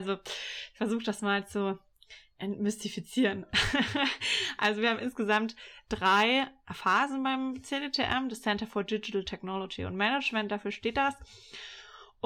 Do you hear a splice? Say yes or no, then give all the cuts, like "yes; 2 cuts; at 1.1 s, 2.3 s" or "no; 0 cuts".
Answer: no; 0 cuts